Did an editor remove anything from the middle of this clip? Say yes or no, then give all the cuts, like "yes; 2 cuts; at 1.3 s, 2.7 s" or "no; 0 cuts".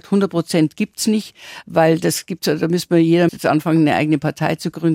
yes; 1 cut; at 3.3 s